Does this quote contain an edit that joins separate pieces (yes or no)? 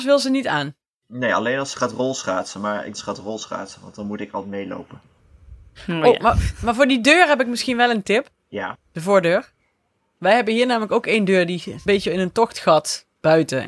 yes